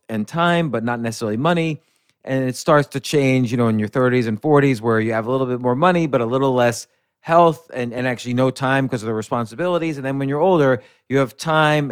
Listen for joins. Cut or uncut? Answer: uncut